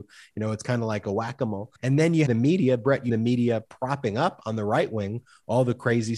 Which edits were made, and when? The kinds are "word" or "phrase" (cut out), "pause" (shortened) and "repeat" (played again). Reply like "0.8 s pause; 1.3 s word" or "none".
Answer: 1.8 s pause; 2.3 s word; 3.1 s word